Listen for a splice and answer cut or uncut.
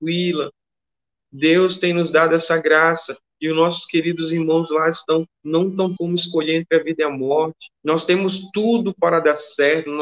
cut